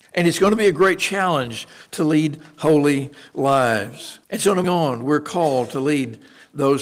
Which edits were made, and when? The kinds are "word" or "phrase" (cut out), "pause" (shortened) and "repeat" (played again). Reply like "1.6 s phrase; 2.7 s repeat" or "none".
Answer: 4.2 s pause; 4.6 s phrase